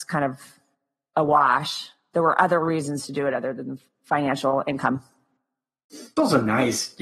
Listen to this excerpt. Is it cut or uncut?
uncut